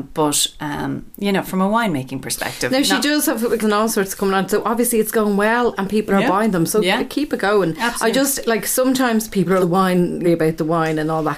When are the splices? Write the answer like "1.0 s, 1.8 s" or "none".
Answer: 3.6 s, 9.6 s, 10.2 s